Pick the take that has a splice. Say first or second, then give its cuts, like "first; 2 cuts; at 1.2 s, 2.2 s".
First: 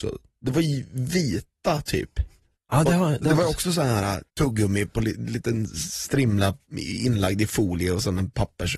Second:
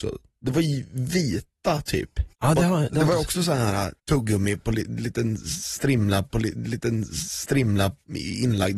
second; 2 cuts; at 2.3 s, 6.3 s